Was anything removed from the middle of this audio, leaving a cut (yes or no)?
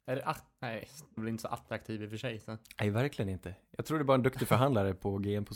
yes